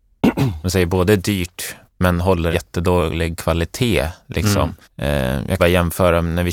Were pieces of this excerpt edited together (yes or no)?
yes